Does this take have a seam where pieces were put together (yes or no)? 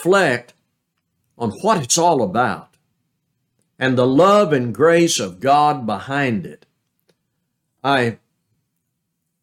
no